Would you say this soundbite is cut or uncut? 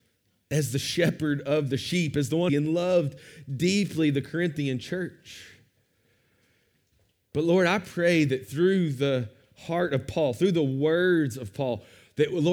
cut